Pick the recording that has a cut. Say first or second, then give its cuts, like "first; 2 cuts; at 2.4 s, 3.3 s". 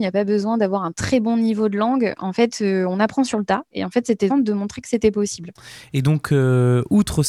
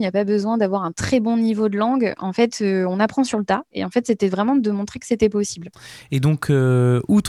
first; 1 cut; at 4.3 s